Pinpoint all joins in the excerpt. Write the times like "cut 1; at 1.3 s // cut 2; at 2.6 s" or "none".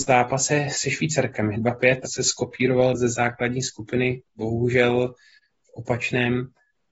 cut 1; at 2.0 s // cut 2; at 2.9 s